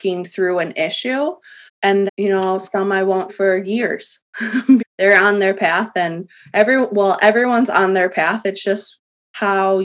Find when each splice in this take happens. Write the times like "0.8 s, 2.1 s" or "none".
1.7 s, 2.1 s, 3.3 s, 4.8 s